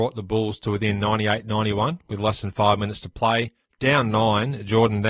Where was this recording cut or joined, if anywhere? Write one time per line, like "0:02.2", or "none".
none